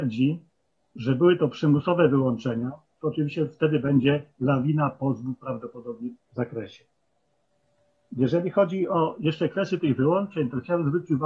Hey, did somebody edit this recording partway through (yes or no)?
yes